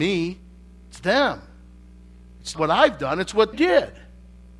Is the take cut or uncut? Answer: cut